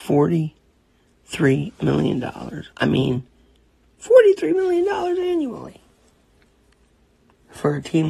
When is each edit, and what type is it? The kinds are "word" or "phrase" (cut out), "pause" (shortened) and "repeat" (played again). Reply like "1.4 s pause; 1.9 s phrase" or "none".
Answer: 2.7 s pause; 3.7 s pause